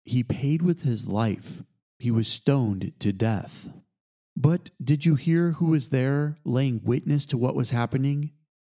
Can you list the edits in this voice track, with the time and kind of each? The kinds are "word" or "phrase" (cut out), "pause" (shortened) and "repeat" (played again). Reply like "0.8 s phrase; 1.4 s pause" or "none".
none